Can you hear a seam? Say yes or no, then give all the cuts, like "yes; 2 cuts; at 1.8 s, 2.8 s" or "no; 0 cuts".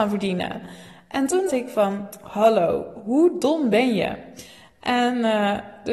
yes; 1 cut; at 1.5 s